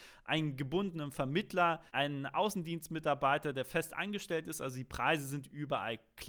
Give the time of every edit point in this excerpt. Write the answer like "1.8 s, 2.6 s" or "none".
1.9 s